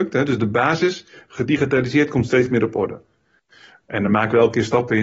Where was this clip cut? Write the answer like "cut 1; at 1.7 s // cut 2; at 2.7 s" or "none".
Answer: none